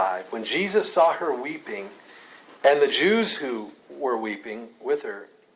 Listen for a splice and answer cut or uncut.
cut